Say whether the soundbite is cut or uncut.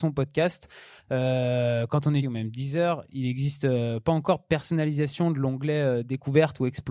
cut